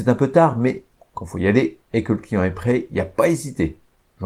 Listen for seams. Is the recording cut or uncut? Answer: cut